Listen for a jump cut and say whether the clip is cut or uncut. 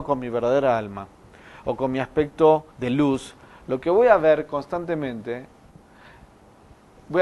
cut